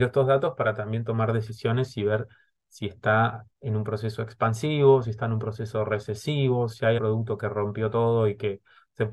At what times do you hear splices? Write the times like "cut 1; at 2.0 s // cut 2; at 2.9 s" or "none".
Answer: cut 1; at 7.0 s

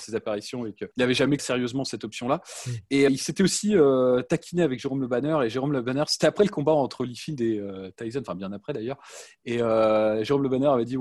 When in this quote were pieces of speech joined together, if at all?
cut 1; at 0.9 s // cut 2; at 1.4 s // cut 3; at 3.1 s

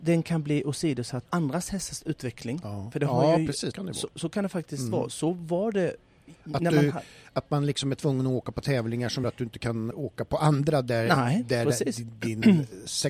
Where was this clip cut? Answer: cut 1; at 1.3 s // cut 2; at 3.7 s // cut 3; at 9.2 s // cut 4; at 9.9 s

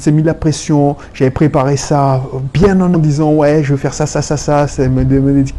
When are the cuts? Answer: cut 1; at 2.9 s

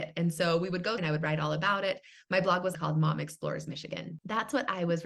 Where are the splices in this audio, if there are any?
cut 1; at 1.0 s // cut 2; at 2.7 s

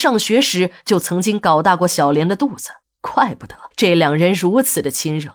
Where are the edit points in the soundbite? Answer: cut 1; at 2.8 s // cut 2; at 3.7 s

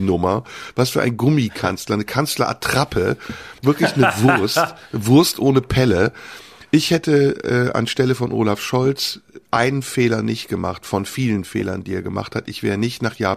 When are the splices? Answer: cut 1; at 3.6 s

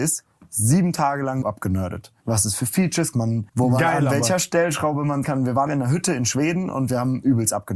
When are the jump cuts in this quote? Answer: cut 1; at 1.4 s // cut 2; at 2.2 s // cut 3; at 3.1 s // cut 4; at 3.5 s // cut 5; at 5.2 s // cut 6; at 5.7 s

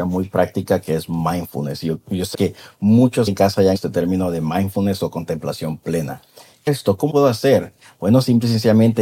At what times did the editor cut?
cut 1; at 2.3 s // cut 2; at 3.3 s // cut 3; at 3.7 s // cut 4; at 6.7 s // cut 5; at 7.1 s

